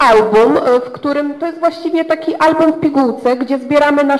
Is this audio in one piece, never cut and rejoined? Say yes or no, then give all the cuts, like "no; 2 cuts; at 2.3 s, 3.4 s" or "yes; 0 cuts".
yes; 0 cuts